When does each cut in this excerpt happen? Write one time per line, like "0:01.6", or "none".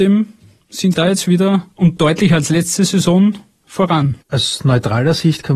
0:00.9
0:02.0
0:04.2